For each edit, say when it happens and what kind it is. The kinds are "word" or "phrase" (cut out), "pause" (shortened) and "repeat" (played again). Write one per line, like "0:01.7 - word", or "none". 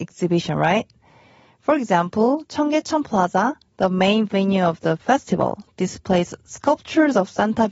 none